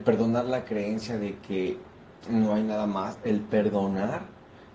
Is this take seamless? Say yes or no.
yes